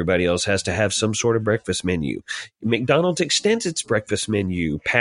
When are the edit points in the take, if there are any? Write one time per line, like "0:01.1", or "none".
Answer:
none